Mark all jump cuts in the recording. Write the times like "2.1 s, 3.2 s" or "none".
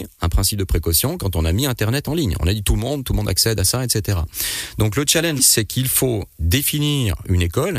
5.4 s